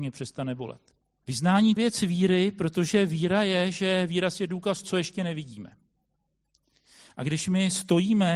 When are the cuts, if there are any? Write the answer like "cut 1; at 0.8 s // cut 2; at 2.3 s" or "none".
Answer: cut 1; at 1.0 s // cut 2; at 1.8 s // cut 3; at 4.8 s